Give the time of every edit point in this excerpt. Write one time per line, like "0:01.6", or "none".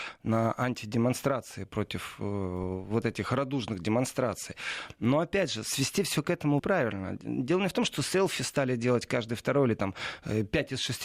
0:06.6